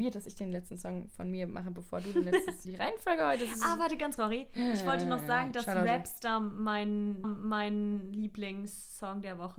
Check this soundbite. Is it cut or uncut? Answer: cut